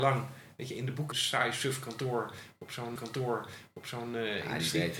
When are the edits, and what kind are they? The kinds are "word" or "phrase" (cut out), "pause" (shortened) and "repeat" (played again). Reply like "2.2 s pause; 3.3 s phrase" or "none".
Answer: 1.1 s phrase; 3.0 s repeat